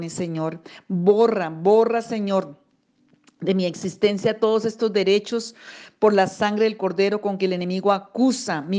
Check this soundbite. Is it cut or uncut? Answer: uncut